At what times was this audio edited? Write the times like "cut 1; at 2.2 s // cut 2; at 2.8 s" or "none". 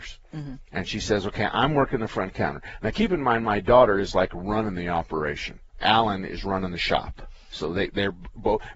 cut 1; at 5.7 s